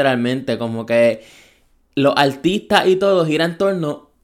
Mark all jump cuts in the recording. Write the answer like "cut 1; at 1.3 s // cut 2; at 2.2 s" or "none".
none

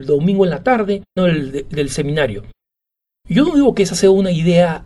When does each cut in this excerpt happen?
cut 1; at 1.2 s

